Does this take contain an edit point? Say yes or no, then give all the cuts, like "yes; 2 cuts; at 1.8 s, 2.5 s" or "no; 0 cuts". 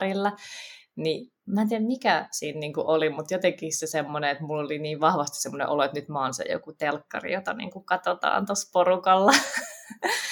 no; 0 cuts